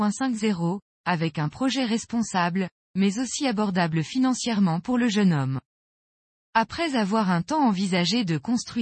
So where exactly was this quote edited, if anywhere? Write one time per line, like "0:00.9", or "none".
none